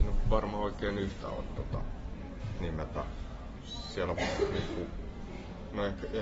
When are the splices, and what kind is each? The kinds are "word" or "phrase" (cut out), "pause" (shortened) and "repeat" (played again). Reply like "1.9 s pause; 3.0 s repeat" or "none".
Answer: 1.2 s word; 2.6 s phrase; 4.2 s word